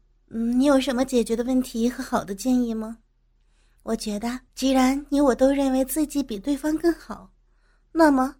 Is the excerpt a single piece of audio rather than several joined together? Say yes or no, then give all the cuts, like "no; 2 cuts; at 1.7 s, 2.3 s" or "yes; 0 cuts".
no; 1 cut; at 4.5 s